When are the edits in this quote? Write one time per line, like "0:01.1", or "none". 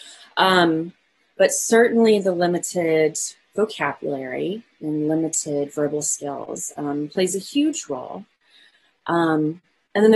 none

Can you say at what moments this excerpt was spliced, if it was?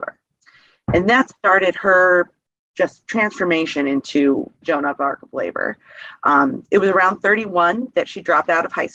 0:04.6

